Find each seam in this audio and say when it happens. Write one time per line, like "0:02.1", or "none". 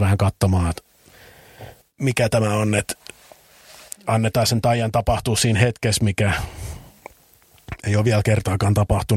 0:01.8